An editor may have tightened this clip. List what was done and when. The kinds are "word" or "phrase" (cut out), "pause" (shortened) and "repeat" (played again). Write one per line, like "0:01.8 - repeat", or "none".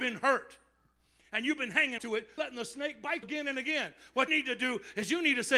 0:02.0 - word
0:02.4 - word
0:03.2 - word
0:04.3 - word